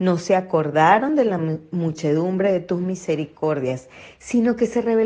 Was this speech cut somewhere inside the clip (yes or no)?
no